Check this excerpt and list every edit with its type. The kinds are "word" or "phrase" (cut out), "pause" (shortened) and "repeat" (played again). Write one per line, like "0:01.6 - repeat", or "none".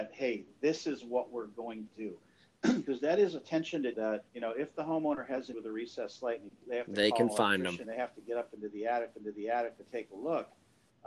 0:01.9 - word
0:03.9 - word
0:04.3 - pause
0:05.5 - word
0:07.8 - word
0:09.1 - repeat